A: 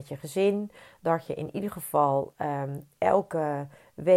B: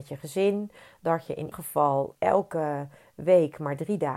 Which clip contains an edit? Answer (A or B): B